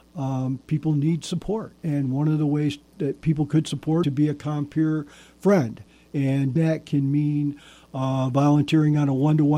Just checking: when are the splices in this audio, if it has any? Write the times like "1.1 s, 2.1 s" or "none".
1.8 s, 4.0 s, 6.6 s